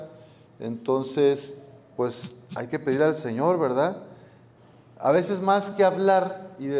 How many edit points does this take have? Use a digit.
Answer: 0